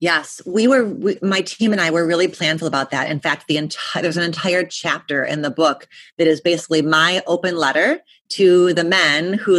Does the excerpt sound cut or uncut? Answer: uncut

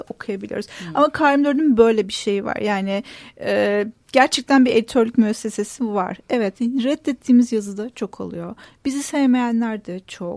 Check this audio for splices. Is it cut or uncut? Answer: uncut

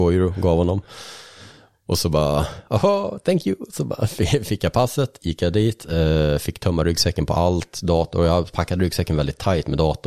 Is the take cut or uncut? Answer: uncut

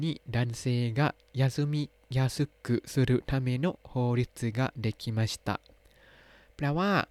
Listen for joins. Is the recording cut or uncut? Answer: uncut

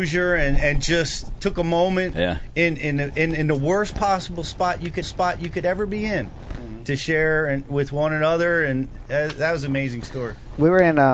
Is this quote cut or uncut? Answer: cut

